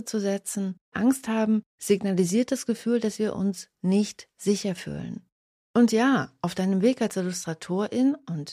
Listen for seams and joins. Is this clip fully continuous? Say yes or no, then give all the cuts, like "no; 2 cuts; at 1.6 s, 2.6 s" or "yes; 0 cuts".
no; 1 cut; at 0.9 s